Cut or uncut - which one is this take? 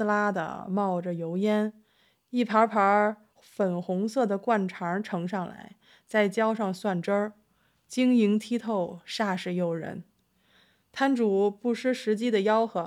uncut